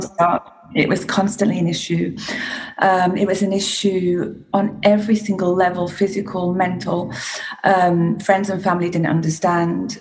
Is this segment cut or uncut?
uncut